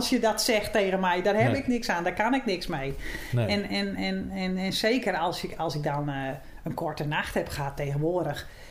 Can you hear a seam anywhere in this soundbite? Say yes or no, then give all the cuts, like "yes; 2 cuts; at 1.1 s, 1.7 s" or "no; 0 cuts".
no; 0 cuts